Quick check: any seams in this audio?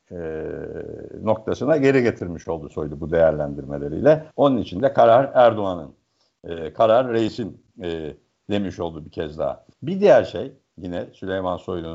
yes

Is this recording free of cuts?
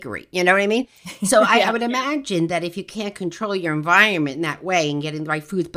yes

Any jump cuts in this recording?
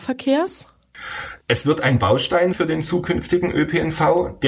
yes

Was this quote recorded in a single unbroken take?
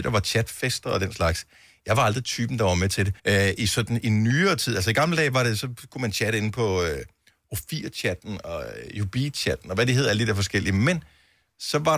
no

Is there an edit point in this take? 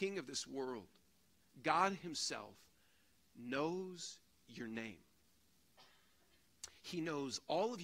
no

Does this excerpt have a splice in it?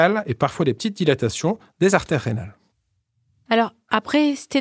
no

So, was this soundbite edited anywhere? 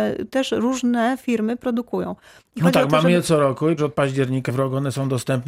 yes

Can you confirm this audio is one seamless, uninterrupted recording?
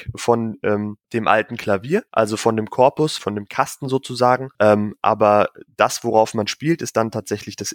no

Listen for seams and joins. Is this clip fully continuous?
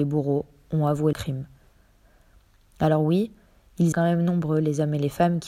no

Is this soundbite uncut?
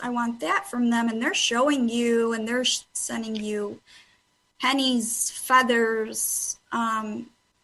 yes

